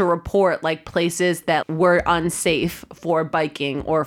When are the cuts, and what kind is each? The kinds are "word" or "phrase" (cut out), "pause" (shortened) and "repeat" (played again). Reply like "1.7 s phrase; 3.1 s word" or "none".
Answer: 1.6 s word